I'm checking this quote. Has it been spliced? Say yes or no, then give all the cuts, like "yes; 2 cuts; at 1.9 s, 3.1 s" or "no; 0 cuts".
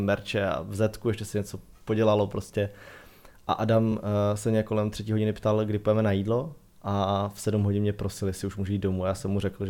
no; 0 cuts